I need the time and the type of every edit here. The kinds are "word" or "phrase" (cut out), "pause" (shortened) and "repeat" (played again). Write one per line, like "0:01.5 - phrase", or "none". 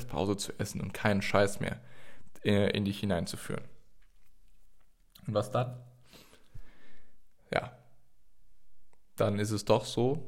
none